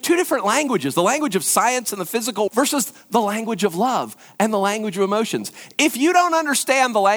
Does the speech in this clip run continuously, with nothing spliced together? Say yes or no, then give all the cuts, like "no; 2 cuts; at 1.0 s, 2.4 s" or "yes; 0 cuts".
no; 1 cut; at 2.5 s